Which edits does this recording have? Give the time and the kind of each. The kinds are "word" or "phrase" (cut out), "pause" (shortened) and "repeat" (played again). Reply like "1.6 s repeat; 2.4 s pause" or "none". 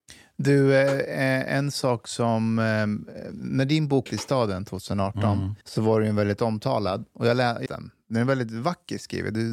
4.1 s phrase; 5.6 s pause; 7.7 s phrase